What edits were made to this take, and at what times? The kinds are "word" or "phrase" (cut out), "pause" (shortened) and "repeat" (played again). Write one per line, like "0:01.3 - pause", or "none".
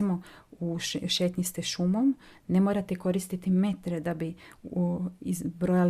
none